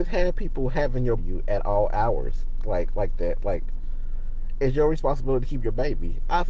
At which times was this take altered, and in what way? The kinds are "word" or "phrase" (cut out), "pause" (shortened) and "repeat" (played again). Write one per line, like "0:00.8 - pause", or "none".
0:01.2 - phrase